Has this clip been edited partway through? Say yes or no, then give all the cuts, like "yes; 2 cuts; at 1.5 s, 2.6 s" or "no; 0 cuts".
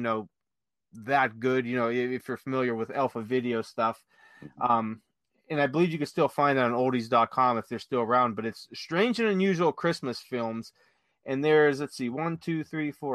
no; 0 cuts